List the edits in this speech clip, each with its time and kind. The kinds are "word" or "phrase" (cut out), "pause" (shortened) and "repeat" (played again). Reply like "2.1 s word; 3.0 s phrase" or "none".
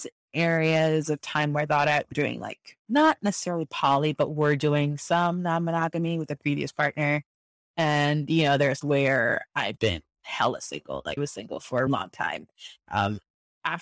2.1 s word; 8.8 s word; 9.8 s word; 11.2 s word; 11.9 s word